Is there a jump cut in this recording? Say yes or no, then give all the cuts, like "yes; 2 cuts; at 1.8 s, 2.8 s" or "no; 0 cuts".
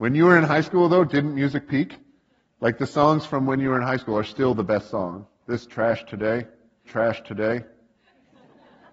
yes; 1 cut; at 6.8 s